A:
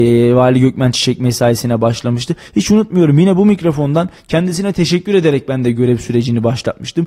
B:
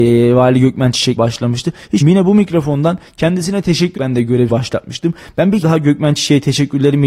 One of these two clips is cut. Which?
B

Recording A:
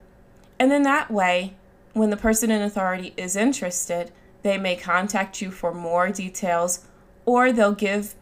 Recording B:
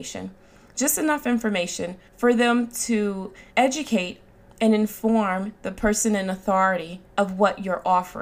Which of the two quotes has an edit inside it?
B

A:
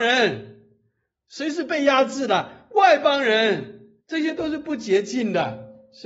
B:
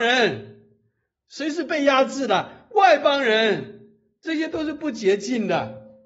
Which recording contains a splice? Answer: A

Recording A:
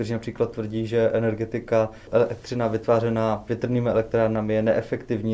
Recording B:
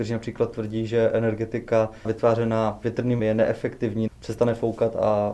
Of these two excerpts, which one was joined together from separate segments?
B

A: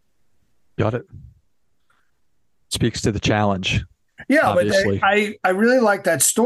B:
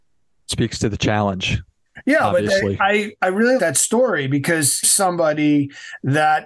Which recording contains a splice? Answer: B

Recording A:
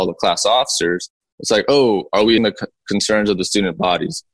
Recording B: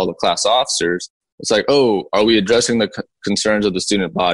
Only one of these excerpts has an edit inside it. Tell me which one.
A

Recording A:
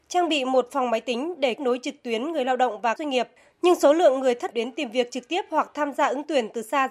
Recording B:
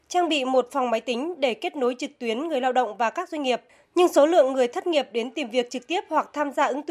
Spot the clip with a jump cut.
A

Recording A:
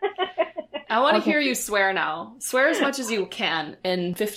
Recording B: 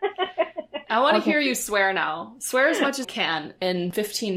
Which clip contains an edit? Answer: B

